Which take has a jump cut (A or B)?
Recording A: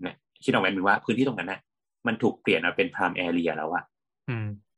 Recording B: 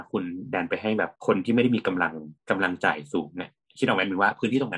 B